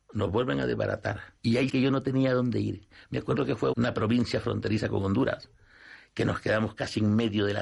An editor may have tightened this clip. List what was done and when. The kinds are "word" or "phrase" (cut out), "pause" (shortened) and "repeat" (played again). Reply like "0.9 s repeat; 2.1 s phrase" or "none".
1.4 s pause; 1.7 s word; 3.7 s word